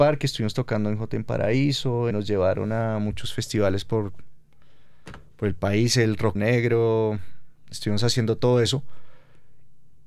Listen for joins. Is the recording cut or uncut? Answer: cut